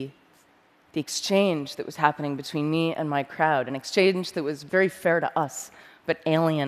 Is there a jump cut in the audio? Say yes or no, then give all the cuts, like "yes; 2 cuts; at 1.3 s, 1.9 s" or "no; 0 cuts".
no; 0 cuts